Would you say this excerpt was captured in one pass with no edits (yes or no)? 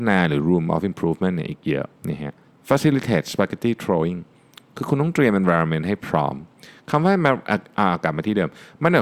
no